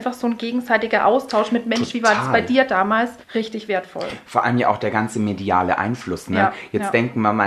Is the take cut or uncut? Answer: cut